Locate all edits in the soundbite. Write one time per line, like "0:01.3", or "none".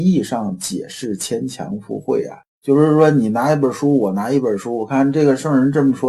0:02.5